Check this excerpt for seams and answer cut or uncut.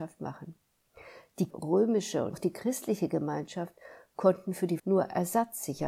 cut